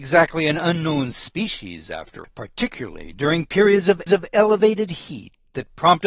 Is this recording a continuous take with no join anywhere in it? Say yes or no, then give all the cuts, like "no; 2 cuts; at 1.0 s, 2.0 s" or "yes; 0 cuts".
no; 2 cuts; at 2.2 s, 4.1 s